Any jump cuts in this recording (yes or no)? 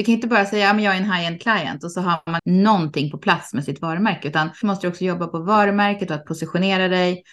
yes